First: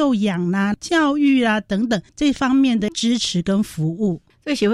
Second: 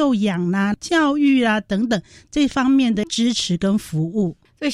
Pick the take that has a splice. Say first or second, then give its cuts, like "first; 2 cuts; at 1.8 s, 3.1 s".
first; 1 cut; at 2.1 s